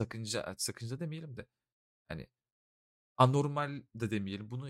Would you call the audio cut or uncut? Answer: uncut